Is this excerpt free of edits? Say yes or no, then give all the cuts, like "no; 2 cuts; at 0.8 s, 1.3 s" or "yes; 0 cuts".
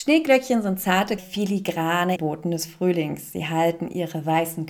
no; 2 cuts; at 1.2 s, 2.2 s